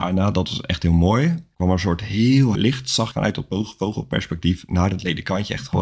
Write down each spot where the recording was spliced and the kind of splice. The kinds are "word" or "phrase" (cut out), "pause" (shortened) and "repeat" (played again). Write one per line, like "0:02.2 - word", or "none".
0:01.5 - pause
0:02.5 - word
0:03.1 - word